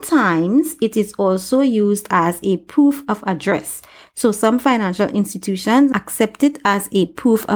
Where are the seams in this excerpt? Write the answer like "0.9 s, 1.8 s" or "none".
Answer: none